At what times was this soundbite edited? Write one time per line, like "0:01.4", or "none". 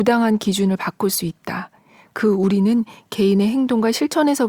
none